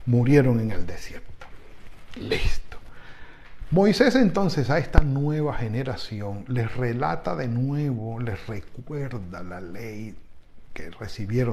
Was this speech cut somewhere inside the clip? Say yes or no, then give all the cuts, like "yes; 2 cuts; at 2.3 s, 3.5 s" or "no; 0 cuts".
no; 0 cuts